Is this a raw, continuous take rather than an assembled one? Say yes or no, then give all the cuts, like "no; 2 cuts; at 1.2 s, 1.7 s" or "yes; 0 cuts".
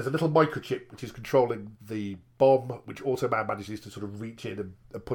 no; 2 cuts; at 1.7 s, 2.3 s